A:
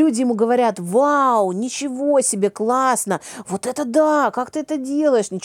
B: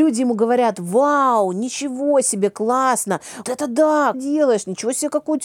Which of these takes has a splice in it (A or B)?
B